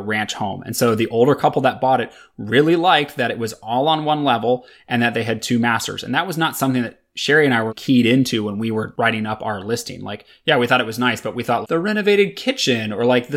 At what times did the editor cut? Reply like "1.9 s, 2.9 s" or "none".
7.7 s, 11.6 s